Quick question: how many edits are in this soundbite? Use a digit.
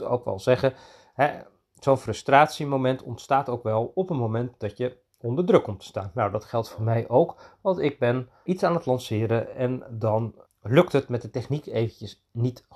2